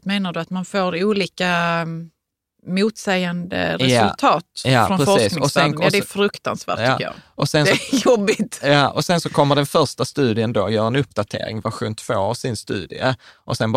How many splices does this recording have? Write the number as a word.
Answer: zero